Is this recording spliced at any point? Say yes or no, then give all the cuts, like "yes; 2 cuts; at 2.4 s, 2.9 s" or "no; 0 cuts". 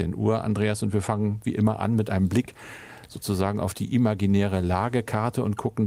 no; 0 cuts